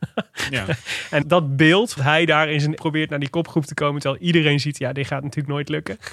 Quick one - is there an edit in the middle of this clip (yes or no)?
yes